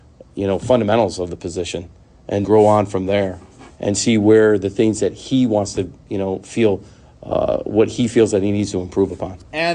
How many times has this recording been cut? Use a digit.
1